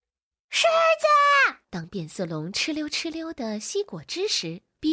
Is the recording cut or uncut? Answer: cut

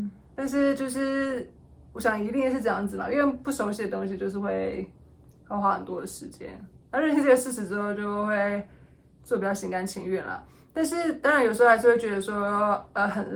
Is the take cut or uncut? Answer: uncut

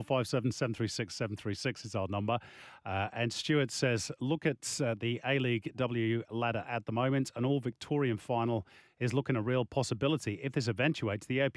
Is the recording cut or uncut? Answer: uncut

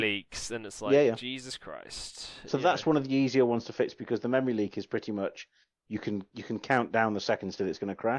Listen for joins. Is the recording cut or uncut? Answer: uncut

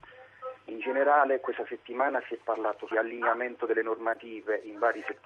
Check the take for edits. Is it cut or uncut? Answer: cut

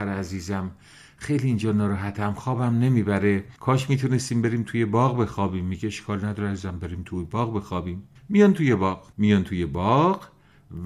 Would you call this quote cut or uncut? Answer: cut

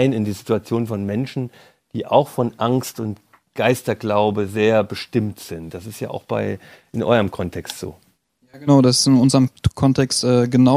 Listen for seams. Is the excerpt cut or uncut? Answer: cut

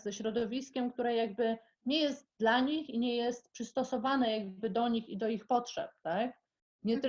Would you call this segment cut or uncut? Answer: uncut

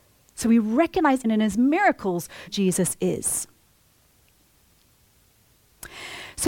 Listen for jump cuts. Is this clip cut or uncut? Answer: cut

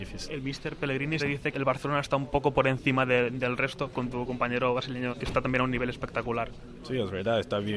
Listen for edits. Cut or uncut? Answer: cut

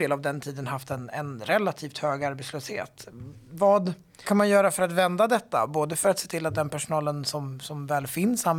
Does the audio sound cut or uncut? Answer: cut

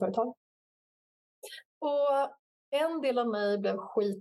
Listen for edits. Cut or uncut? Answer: cut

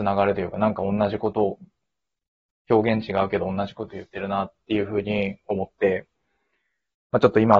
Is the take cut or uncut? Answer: uncut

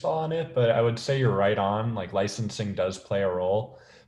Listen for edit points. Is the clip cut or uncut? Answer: uncut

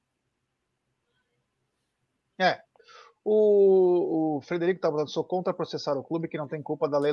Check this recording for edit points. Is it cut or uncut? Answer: uncut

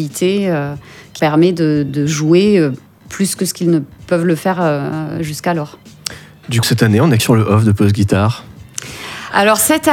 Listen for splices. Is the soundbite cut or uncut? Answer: cut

